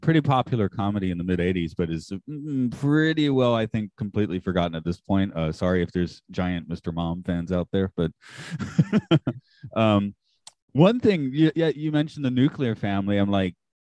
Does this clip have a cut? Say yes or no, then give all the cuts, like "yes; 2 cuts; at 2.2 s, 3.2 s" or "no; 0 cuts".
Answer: no; 0 cuts